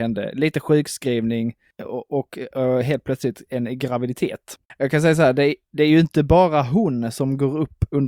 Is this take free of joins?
yes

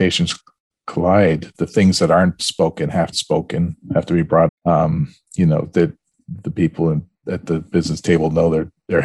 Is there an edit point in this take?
yes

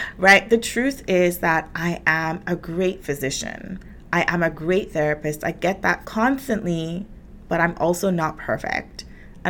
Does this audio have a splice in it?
yes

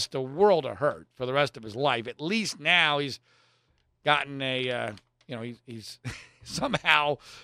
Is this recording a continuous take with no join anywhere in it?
yes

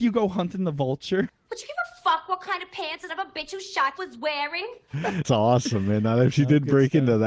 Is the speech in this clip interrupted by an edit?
yes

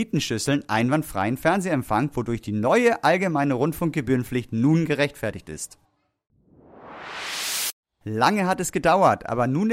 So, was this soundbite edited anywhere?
no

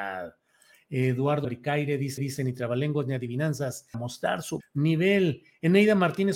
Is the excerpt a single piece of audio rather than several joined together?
no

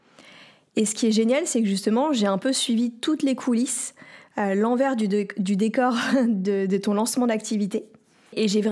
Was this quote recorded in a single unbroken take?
yes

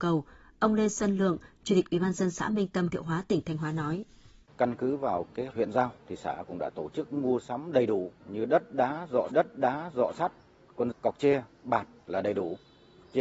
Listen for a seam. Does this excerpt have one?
yes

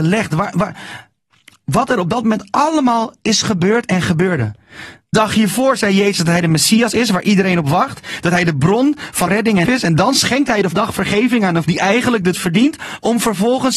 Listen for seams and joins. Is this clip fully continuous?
no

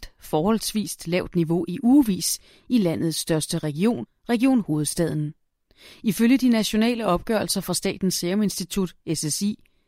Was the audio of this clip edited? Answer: no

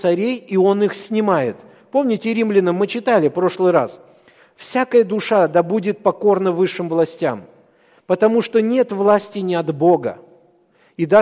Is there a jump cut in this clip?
no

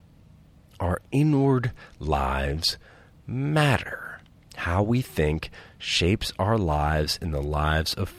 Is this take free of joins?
no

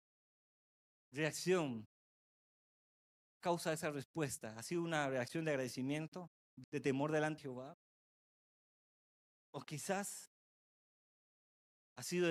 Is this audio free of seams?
no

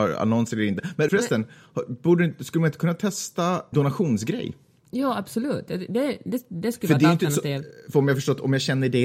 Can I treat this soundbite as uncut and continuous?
no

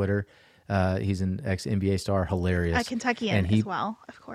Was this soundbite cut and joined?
no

